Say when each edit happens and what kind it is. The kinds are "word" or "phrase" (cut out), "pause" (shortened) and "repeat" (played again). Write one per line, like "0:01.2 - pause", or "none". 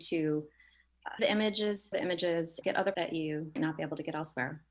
0:01.2 - word
0:01.9 - word
0:02.6 - word
0:02.9 - word
0:03.6 - word